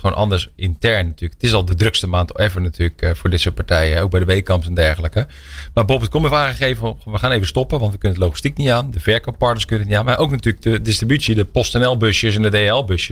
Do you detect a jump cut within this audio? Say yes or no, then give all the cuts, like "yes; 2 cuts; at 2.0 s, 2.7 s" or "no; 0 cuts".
no; 0 cuts